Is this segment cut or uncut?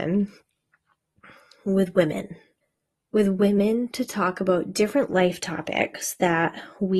cut